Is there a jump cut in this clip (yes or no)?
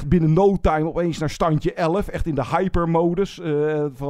no